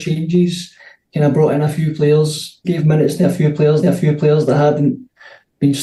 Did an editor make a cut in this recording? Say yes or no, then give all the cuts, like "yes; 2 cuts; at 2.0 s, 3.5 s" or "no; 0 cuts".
yes; 2 cuts; at 2.6 s, 3.8 s